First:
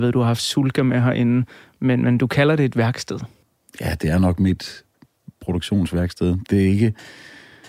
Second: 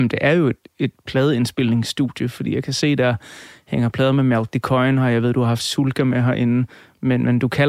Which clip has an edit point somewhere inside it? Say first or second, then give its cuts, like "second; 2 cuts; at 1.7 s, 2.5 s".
first; 1 cut; at 6.5 s